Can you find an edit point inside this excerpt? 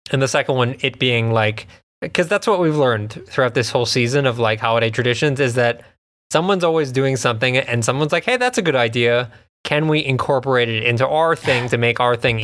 no; 0 cuts

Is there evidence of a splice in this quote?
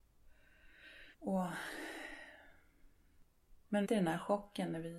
yes; 2 cuts; at 1.1 s, 3.8 s

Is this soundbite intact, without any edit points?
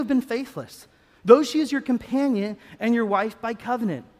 yes; 0 cuts

